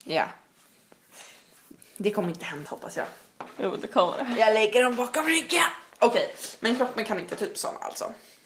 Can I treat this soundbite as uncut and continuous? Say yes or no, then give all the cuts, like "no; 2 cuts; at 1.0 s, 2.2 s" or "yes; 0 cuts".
no; 1 cut; at 2.7 s